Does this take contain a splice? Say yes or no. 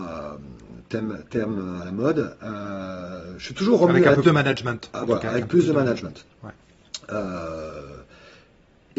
yes